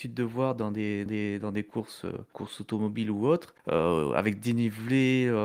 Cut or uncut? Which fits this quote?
cut